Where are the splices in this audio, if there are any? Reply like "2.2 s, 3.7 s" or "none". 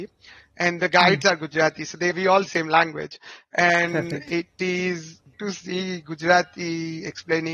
2.1 s, 2.5 s, 5.3 s